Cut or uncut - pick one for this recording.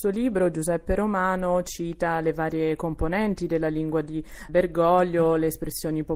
cut